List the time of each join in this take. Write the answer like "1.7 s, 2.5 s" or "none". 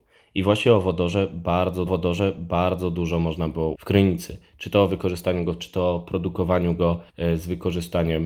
1.9 s, 3.7 s, 5.6 s, 7.1 s